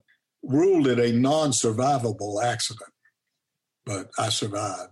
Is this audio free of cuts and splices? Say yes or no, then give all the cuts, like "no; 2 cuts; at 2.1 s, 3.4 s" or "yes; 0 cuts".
yes; 0 cuts